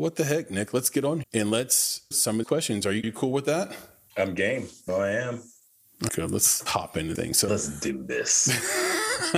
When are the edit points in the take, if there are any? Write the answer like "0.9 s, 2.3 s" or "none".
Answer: 1.2 s, 2.1 s, 2.4 s, 3.0 s, 4.9 s, 6.1 s, 6.7 s, 7.1 s, 7.5 s